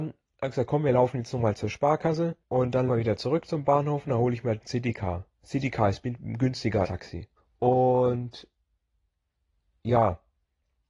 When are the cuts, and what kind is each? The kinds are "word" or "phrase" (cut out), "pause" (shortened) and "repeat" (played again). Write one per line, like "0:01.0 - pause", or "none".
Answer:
0:02.4 - pause
0:02.9 - word
0:05.3 - pause
0:06.8 - word
0:07.4 - pause